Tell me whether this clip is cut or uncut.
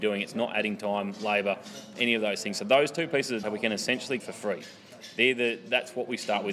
cut